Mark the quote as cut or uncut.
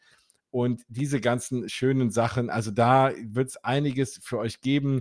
uncut